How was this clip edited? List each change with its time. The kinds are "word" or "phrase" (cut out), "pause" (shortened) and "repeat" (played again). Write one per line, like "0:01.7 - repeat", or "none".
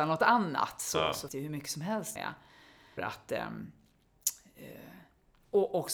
0:01.3 - word
0:02.2 - word
0:03.0 - word